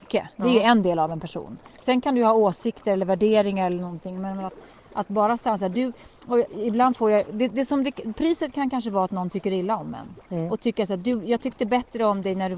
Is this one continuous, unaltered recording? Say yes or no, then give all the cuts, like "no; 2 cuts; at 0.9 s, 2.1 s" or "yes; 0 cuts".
yes; 0 cuts